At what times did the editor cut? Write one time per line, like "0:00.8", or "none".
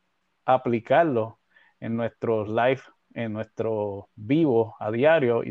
none